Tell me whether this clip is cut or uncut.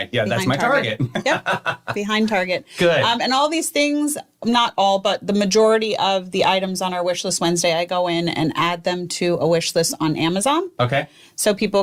uncut